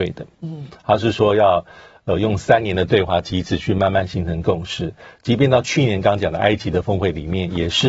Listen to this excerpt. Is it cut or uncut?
uncut